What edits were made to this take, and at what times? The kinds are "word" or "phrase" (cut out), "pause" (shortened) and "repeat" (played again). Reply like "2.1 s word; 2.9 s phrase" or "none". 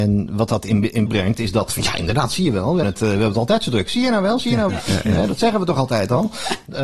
1.1 s word; 1.7 s phrase; 2.8 s word; 4.7 s word

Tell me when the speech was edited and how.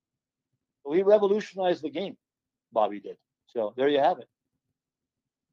none

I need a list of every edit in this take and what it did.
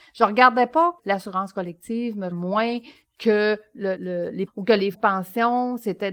1.0 s word; 2.3 s word; 4.0 s word; 4.5 s word; 4.9 s word

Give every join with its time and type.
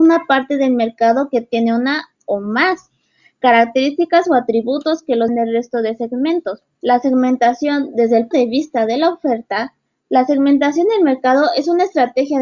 5.3 s word; 6.7 s pause; 8.3 s word; 9.9 s pause

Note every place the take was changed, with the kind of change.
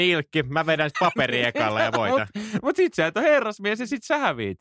0.9 s word

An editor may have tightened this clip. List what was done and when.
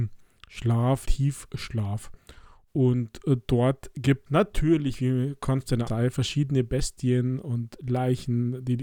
1.0 s word; 4.3 s word; 5.9 s word

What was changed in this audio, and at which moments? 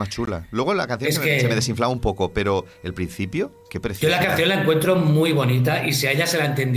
3.6 s pause

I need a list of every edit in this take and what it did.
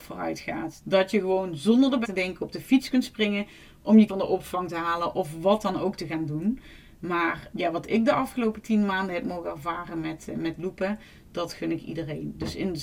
2.0 s word; 4.1 s word; 7.5 s word

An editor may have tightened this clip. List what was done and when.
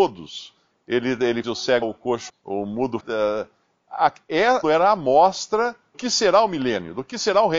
1.4 s word; 1.8 s word; 2.3 s word; 3.0 s word; 4.6 s word; 5.9 s word

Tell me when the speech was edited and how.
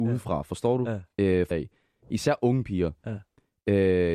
1.5 s word

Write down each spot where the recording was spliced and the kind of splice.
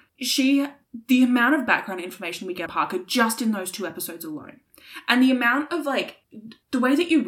2.7 s word

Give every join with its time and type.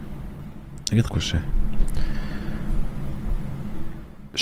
1.1 s word

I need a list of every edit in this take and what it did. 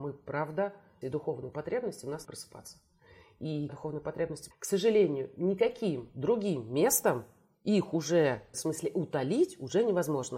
1.0 s word; 2.2 s word; 3.7 s word; 4.5 s word; 8.5 s word

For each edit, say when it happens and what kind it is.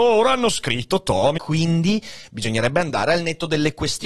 1.4 s phrase

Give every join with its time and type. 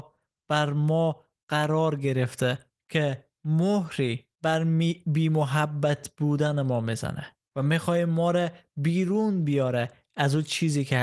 2.7 s pause; 4.3 s pause; 7.4 s pause

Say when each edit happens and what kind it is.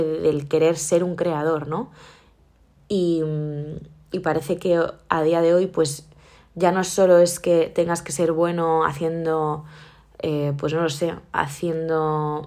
none

